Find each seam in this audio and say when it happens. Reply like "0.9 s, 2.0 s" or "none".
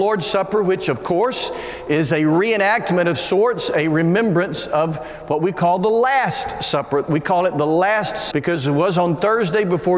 8.3 s